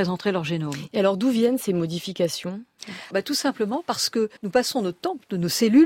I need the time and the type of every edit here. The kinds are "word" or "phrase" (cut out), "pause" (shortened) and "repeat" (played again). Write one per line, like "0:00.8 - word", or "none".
0:03.1 - word
0:04.4 - pause